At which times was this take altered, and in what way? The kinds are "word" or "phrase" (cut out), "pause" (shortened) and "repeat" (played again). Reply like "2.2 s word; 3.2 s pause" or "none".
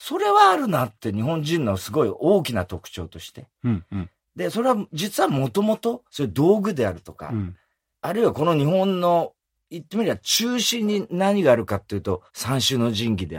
6.1 s pause; 12.3 s pause